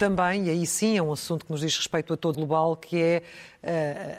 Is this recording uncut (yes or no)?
no